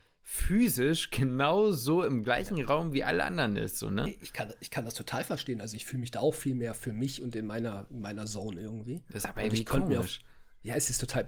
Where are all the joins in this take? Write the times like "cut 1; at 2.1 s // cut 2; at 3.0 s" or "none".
none